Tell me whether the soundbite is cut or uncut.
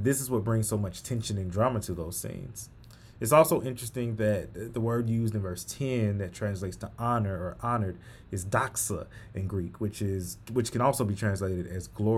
uncut